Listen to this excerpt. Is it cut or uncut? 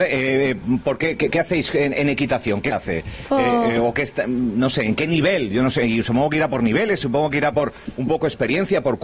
cut